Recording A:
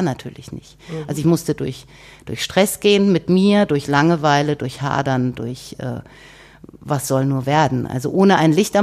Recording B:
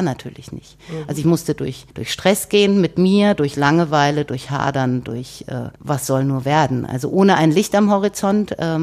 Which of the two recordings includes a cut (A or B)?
B